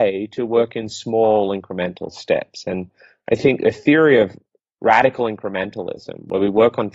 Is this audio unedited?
yes; 0 cuts

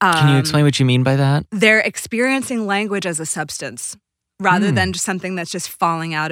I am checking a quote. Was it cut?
no; 0 cuts

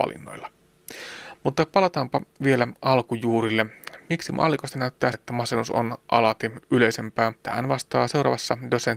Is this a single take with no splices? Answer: no; 2 cuts; at 5.1 s, 7.4 s

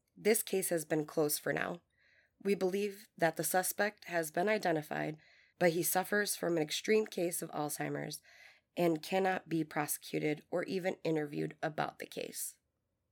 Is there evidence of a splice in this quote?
no; 0 cuts

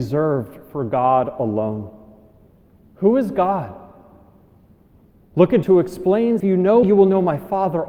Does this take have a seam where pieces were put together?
yes; 3 cuts; at 5.6 s, 6.4 s, 6.8 s

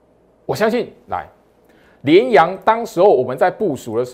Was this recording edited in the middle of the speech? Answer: no; 0 cuts

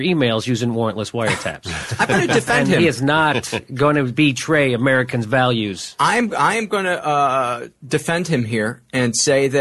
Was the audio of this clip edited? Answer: no; 0 cuts

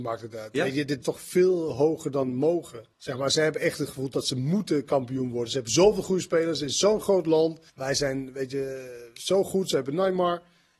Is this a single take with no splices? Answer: no; 3 cuts; at 1.0 s, 2.9 s, 7.7 s

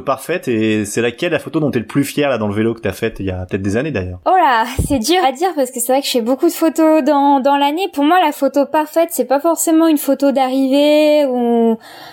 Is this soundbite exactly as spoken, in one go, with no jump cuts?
no; 1 cut; at 5.2 s

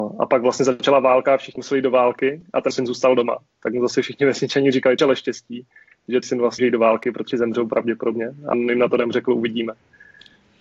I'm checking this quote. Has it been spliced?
yes; 7 cuts; at 1.6 s, 2.7 s, 5.0 s, 6.2 s, 6.6 s, 7.3 s, 8.5 s

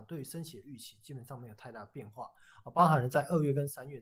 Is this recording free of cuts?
yes; 0 cuts

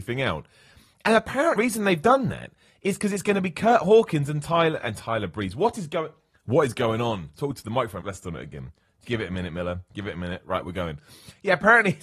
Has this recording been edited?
yes; 2 cuts; at 1.6 s, 8.0 s

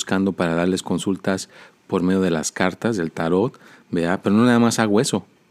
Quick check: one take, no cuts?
yes; 0 cuts

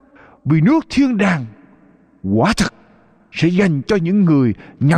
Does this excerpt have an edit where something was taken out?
no; 0 cuts

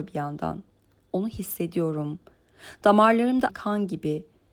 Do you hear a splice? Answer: yes; 1 cut; at 3.5 s

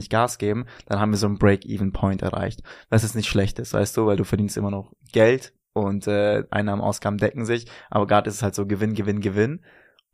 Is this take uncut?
yes; 0 cuts

